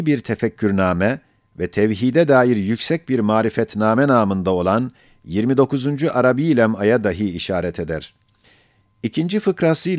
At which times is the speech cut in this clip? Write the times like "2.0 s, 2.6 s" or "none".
none